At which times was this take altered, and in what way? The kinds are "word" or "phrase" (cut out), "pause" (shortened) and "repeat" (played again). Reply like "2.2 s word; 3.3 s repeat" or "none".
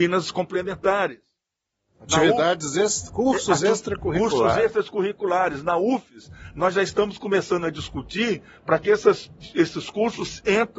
none